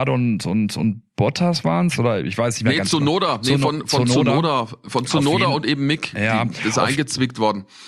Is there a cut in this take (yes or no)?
no